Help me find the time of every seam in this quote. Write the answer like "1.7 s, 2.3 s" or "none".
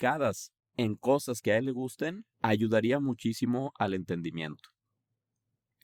2.3 s